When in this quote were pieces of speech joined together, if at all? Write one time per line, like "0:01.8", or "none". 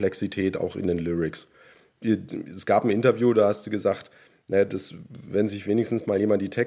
none

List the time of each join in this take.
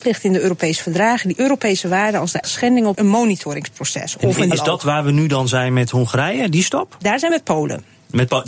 0:02.4
0:02.9
0:04.5
0:07.3

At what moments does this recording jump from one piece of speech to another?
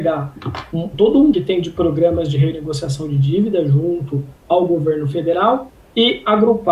0:00.9
0:01.3
0:04.4

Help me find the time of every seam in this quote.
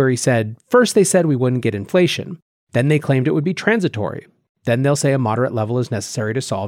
none

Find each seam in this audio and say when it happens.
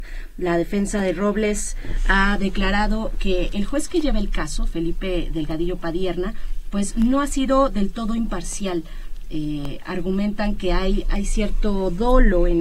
0:09.2

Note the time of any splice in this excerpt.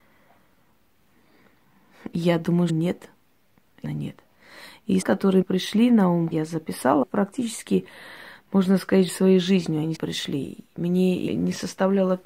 0:02.7
0:03.8
0:05.0
0:05.4
0:06.3
0:07.0
0:09.1
0:09.9
0:11.3

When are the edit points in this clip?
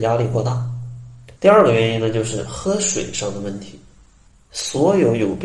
0:01.4

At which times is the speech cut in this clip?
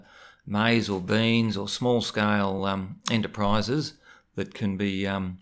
none

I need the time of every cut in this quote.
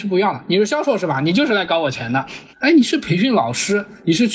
0:02.5

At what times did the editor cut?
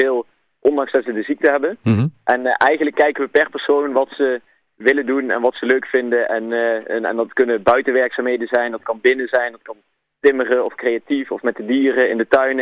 none

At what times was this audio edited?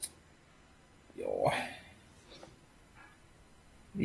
none

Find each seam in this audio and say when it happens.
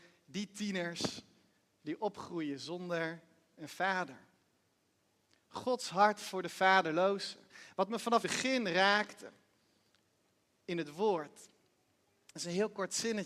0:08.2

